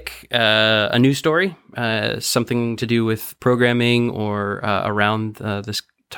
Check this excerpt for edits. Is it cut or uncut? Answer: uncut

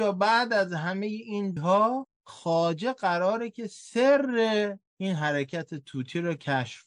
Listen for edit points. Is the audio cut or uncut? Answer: cut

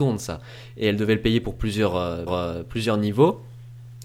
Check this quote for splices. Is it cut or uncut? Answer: cut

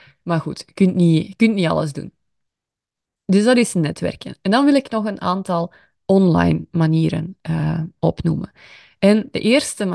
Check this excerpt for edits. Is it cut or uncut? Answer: uncut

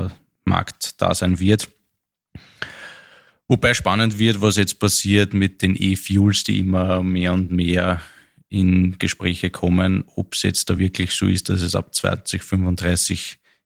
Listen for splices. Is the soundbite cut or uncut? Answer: uncut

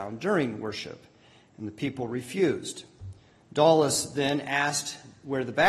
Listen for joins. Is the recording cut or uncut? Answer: uncut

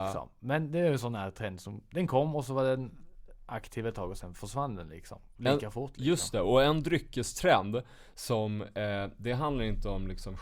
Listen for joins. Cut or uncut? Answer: uncut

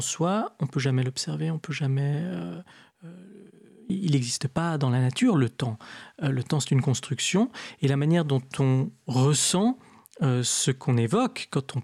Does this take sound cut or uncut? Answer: uncut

